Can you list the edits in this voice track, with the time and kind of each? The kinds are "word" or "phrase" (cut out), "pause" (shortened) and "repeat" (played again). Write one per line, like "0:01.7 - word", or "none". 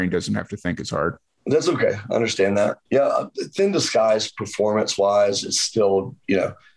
0:01.3 - pause
0:02.8 - pause